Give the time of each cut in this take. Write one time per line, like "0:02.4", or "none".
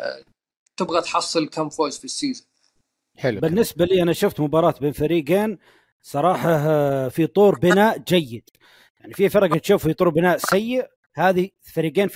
none